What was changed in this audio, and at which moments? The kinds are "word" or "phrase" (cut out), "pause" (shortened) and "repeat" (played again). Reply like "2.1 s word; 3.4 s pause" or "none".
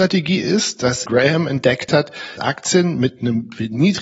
1.1 s word; 2.4 s word